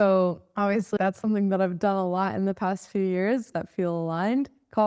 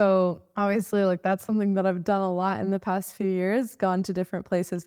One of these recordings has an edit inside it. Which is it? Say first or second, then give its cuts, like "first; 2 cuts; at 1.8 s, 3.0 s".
first; 2 cuts; at 1.0 s, 3.5 s